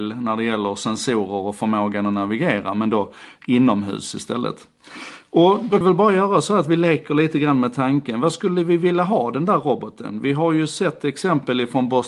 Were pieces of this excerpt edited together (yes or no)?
yes